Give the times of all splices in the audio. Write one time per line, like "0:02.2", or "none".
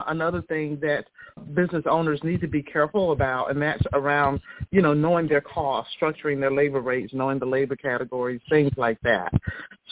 0:01.4